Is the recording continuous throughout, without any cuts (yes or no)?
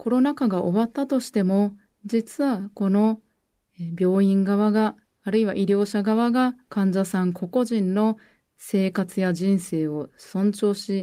yes